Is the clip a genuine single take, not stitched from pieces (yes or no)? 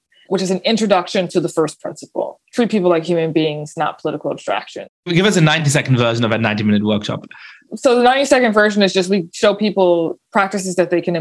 no